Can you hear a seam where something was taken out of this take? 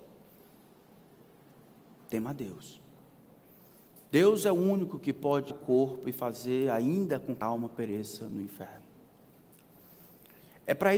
yes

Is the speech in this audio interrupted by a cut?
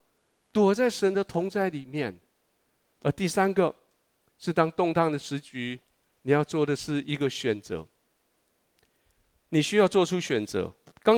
no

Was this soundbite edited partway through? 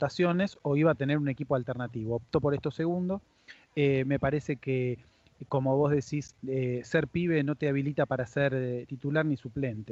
yes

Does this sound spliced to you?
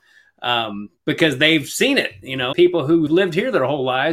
yes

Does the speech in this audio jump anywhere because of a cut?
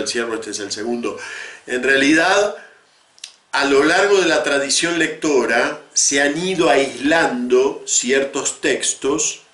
no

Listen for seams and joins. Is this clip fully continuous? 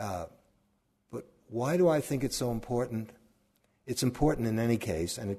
yes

